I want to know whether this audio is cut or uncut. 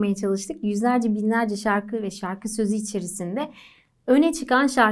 uncut